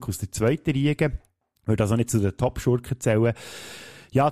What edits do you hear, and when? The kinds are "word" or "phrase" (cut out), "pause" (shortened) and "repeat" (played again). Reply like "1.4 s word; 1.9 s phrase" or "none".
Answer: none